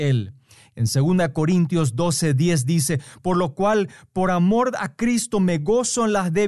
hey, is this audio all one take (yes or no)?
yes